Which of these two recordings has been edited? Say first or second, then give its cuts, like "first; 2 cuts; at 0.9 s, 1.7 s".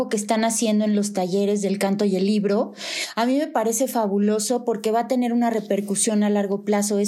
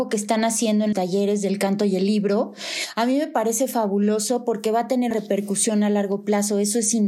second; 2 cuts; at 0.9 s, 5.1 s